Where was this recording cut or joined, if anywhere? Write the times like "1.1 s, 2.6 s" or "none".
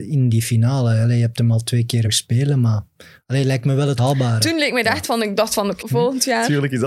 2.1 s, 4.0 s, 5.0 s, 5.8 s